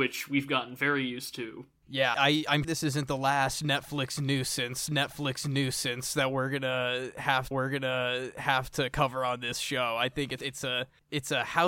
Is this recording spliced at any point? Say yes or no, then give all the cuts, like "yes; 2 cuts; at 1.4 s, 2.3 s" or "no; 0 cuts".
yes; 5 cuts; at 2.1 s, 2.6 s, 4.9 s, 7.5 s, 10.4 s